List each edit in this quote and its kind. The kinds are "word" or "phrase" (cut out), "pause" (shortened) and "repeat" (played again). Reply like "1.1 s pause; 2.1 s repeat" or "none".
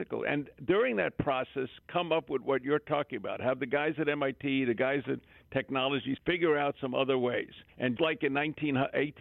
6.2 s word; 8.0 s word